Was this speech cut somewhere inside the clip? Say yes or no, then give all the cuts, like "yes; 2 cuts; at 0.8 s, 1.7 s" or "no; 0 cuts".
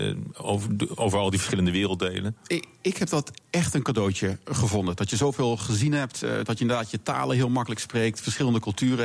no; 0 cuts